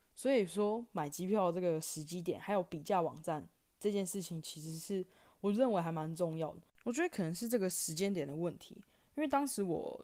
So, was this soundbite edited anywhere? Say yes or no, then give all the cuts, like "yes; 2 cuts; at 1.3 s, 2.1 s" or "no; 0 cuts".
no; 0 cuts